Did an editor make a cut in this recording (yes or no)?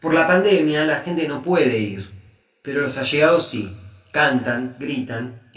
no